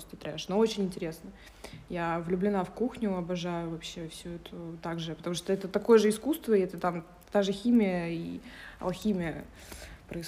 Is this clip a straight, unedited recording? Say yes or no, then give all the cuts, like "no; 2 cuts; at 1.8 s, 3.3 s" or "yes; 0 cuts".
yes; 0 cuts